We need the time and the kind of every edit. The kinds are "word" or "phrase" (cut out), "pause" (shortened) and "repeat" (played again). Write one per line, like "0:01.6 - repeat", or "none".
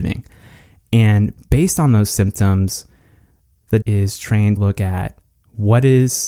0:03.8 - word
0:04.6 - word